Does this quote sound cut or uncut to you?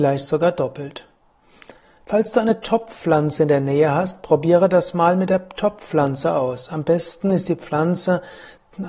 uncut